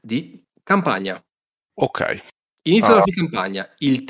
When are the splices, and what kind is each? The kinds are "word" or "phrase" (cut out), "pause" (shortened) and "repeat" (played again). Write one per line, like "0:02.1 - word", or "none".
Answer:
0:03.0 - word